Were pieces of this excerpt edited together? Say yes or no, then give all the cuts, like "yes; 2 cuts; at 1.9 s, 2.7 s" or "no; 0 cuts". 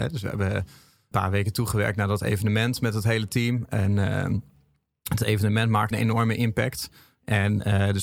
yes; 2 cuts; at 1.1 s, 5.9 s